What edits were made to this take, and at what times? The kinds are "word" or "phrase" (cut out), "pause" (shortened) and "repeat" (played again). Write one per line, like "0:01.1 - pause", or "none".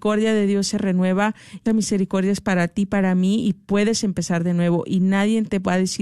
0:01.7 - word